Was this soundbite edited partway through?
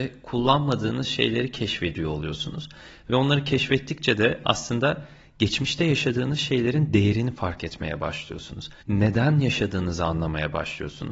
yes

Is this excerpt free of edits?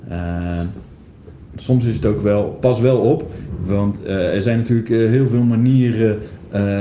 yes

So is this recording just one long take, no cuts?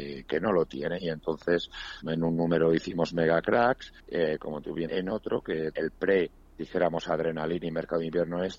no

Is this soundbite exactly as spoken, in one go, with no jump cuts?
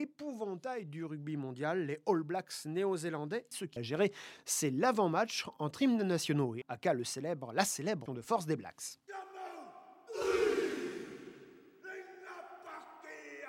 no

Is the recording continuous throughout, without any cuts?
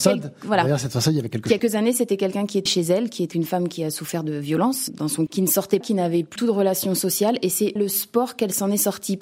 no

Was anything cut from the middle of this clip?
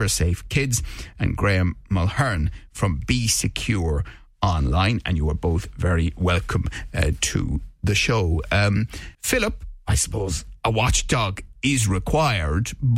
yes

